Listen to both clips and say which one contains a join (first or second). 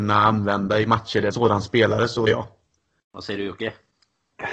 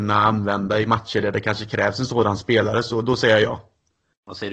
first